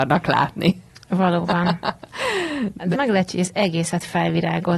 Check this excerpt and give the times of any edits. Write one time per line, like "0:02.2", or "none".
0:02.9
0:03.3